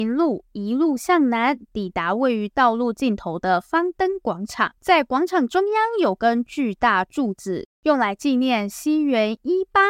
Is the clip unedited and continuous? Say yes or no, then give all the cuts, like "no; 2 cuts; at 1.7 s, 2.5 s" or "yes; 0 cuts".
no; 1 cut; at 4.8 s